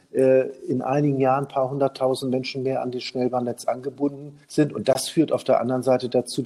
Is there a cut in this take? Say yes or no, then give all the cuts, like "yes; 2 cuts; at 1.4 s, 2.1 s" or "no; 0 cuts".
yes; 1 cut; at 4.4 s